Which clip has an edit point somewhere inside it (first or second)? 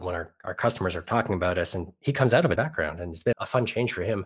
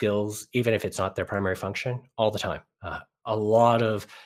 first